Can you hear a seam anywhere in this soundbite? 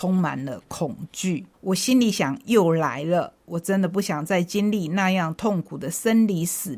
yes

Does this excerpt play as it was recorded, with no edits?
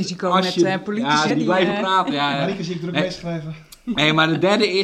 no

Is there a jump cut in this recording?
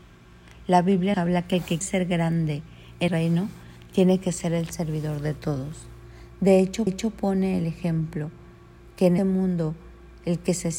yes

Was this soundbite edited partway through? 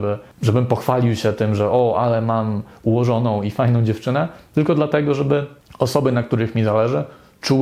no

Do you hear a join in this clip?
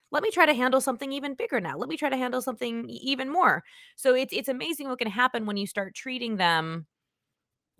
no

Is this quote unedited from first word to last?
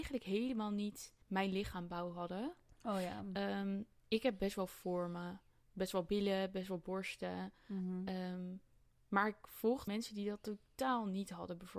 no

